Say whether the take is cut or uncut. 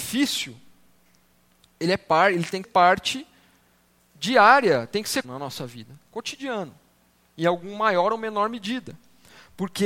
cut